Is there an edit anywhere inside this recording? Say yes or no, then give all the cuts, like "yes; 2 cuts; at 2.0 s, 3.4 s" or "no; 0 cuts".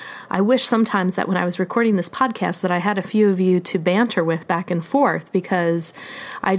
no; 0 cuts